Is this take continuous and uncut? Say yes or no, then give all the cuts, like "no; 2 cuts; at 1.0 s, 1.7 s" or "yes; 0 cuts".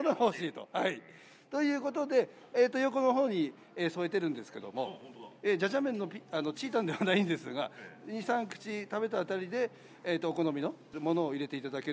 yes; 0 cuts